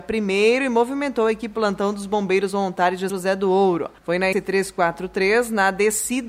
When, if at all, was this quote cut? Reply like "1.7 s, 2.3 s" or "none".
1.5 s, 3.1 s, 4.0 s, 4.3 s

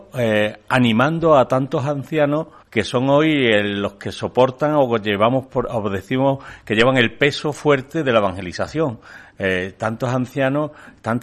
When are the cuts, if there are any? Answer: 2.6 s

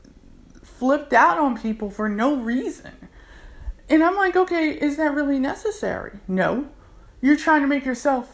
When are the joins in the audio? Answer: 7.4 s

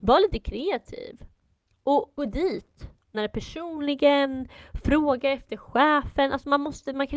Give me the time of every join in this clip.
2.2 s, 3.1 s

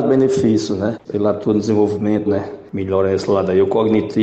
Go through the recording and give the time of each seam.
2.3 s

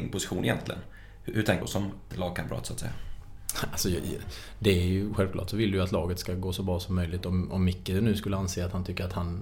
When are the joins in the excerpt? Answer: 1.6 s, 2.1 s

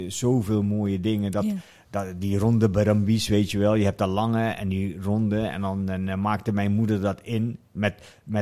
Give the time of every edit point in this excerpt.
none

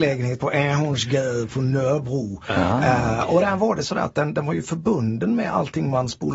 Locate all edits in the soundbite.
none

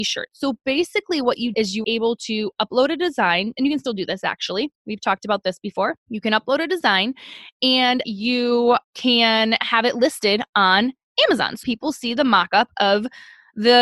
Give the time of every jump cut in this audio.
1.5 s, 1.8 s, 6.0 s, 8.0 s, 8.8 s, 11.6 s

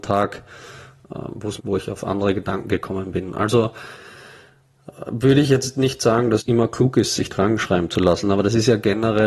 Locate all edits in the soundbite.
1.6 s, 6.4 s, 7.3 s

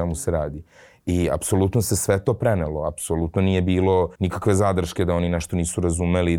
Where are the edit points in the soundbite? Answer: 4.1 s

